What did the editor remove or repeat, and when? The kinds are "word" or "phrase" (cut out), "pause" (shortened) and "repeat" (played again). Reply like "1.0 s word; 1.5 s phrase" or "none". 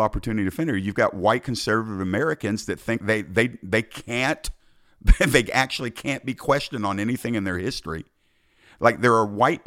3.0 s word